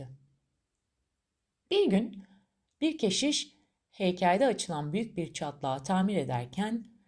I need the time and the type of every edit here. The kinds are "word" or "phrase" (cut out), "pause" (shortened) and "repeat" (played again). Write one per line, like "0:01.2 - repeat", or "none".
none